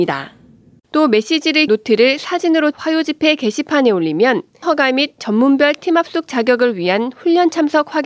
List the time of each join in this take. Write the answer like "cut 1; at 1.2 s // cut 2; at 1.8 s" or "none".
cut 1; at 1.7 s // cut 2; at 2.7 s // cut 3; at 4.6 s